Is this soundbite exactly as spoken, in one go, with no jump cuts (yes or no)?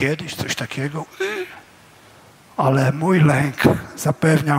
yes